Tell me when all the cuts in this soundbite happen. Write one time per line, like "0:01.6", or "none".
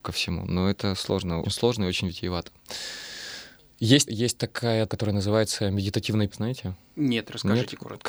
0:01.4
0:04.1
0:04.9
0:06.3